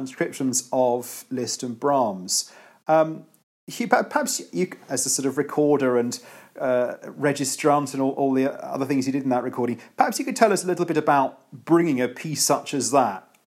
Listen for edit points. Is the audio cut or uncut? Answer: uncut